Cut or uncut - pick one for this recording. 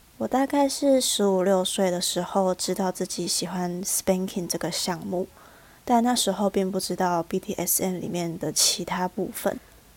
uncut